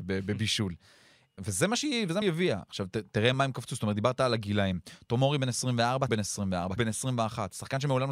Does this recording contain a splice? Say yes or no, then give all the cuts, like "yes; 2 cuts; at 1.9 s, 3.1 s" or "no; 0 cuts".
yes; 5 cuts; at 1.4 s, 2.2 s, 3.3 s, 6.1 s, 6.8 s